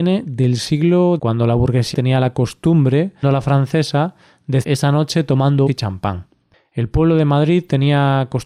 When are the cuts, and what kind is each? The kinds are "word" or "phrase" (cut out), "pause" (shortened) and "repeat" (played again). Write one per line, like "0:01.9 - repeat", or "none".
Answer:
0:01.2 - word
0:01.9 - word
0:03.2 - word
0:04.6 - word
0:05.7 - word